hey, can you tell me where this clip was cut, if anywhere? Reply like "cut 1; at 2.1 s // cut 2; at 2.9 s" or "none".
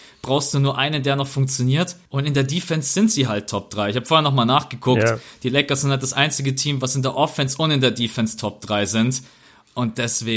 cut 1; at 2.1 s